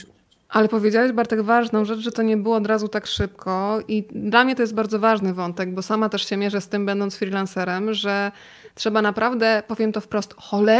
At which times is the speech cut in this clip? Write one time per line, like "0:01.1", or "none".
none